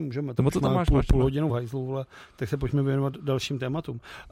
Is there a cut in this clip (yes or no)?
no